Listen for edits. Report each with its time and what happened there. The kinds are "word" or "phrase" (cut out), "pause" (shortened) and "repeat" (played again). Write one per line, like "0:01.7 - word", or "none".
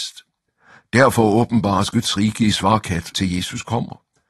0:03.1 - word